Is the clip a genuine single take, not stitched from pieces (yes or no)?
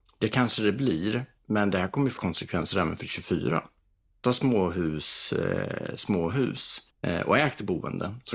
no